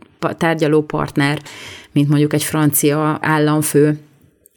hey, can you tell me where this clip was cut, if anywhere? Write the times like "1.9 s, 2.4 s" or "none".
none